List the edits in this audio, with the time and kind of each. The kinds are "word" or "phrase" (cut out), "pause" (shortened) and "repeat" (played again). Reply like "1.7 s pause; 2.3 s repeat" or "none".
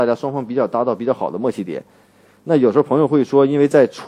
none